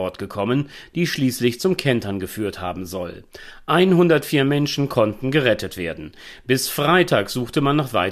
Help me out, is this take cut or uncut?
uncut